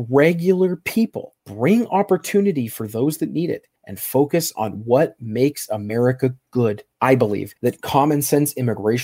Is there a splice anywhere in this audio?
yes; 4 cuts; at 1.4 s, 3.8 s, 6.9 s, 7.6 s

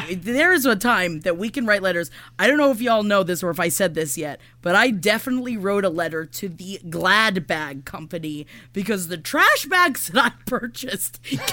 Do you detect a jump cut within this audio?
no; 0 cuts

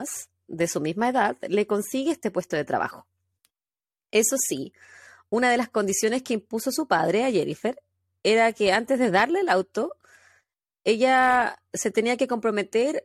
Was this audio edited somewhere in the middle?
no; 0 cuts

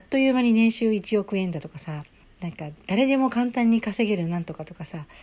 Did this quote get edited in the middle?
yes; 1 cut; at 2.2 s

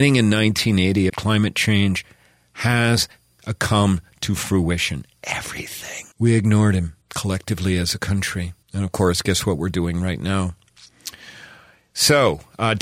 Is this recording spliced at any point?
yes; 4 cuts; at 1.1 s, 6.1 s, 7.0 s, 8.6 s

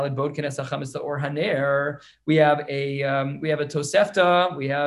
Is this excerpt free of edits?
yes; 0 cuts

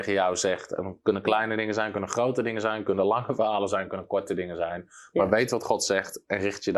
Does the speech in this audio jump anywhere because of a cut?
no; 0 cuts

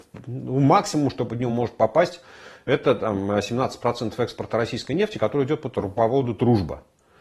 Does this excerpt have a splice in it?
no; 0 cuts

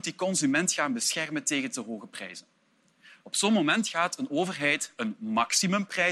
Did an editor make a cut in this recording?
no; 0 cuts

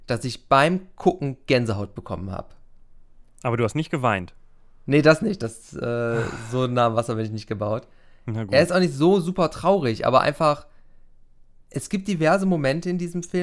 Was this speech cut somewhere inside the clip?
no; 0 cuts

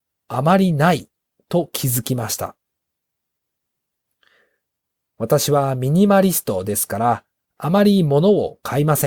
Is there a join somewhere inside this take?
no; 0 cuts

